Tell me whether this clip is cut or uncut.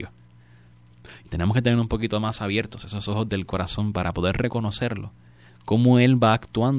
uncut